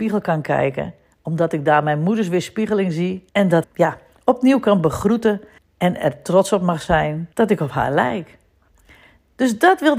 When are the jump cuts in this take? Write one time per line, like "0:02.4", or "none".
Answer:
0:03.3
0:03.6
0:05.6
0:07.3